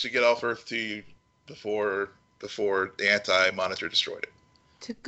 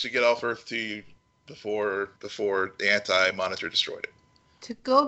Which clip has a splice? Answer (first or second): second